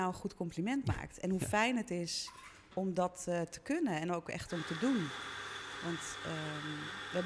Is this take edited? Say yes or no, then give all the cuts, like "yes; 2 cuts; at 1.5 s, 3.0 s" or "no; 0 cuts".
no; 0 cuts